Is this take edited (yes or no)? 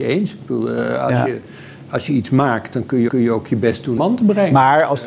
yes